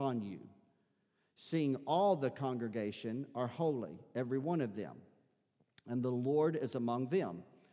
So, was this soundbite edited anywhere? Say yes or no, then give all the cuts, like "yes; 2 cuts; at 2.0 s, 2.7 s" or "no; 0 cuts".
no; 0 cuts